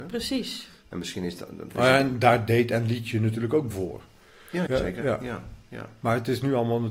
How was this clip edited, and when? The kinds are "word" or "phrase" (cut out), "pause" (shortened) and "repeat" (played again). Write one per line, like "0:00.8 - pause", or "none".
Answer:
0:03.7 - word
0:04.7 - word

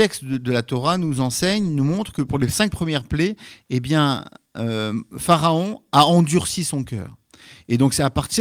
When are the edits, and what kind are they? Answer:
none

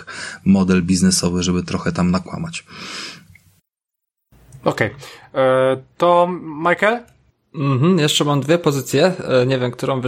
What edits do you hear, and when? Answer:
none

